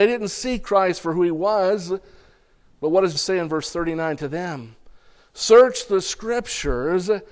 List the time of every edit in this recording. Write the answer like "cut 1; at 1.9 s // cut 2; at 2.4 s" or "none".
cut 1; at 3.1 s